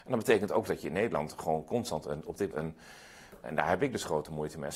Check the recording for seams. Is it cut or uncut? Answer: cut